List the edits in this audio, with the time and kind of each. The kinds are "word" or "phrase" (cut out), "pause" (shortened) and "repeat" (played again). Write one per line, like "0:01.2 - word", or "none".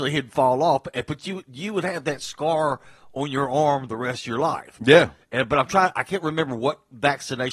none

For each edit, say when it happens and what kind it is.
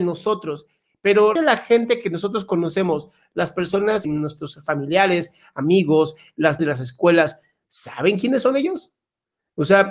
0:01.4 - word
0:04.0 - word
0:06.6 - word

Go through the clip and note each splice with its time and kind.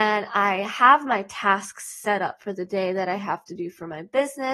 none

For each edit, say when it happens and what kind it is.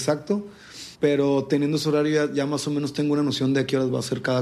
0:00.9 - pause

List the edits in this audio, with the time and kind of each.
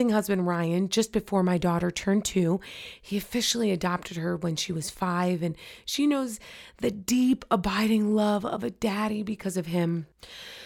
none

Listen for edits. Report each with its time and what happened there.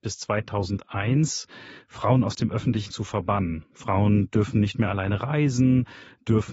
0:02.9 - word

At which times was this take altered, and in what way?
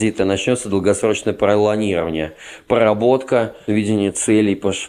0:03.7 - word

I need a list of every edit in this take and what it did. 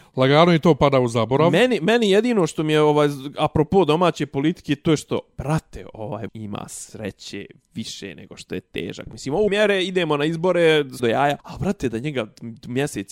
0:06.3 - word
0:09.5 - word
0:11.0 - phrase
0:11.4 - pause

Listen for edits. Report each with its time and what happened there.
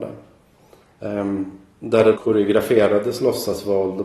0:02.1 - word

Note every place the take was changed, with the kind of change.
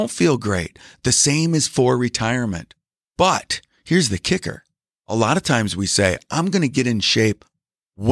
none

